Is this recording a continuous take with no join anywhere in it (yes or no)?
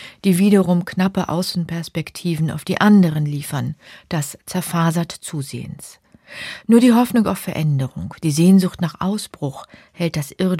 yes